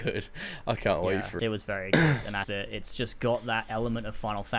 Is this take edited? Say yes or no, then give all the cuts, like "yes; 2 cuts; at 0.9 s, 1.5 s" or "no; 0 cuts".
yes; 2 cuts; at 1.4 s, 2.4 s